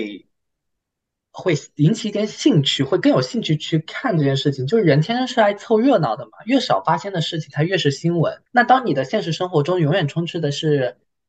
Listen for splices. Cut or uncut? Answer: cut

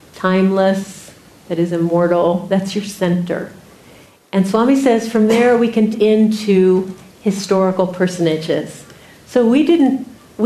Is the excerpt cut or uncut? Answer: cut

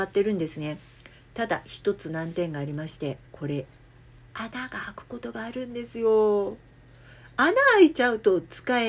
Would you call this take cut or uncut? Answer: cut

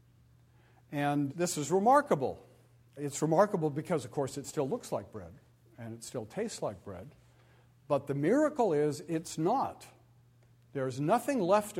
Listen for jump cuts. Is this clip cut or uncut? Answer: uncut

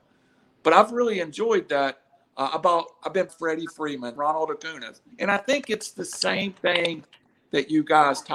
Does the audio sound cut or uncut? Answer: cut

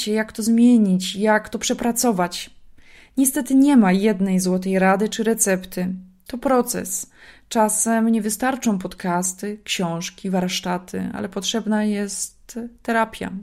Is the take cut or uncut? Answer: uncut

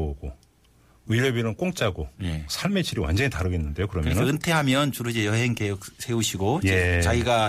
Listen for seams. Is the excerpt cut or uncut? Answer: uncut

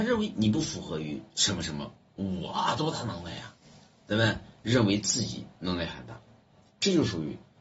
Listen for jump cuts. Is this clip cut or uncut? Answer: uncut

